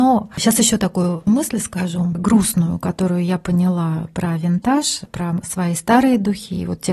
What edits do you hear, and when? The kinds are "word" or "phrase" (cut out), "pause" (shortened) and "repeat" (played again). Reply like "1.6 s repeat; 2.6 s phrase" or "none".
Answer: 1.3 s word

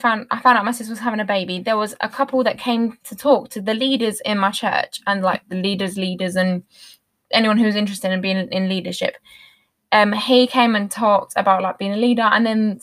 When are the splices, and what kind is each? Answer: none

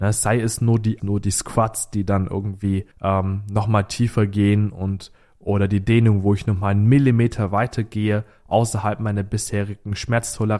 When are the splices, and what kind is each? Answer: 1.0 s phrase; 2.9 s pause

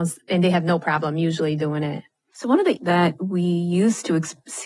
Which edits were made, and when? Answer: 2.8 s word

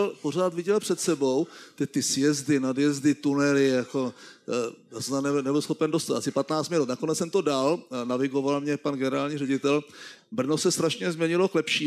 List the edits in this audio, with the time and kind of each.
none

